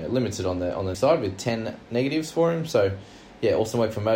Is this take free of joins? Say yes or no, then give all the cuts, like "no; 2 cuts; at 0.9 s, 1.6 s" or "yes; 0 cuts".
no; 1 cut; at 0.9 s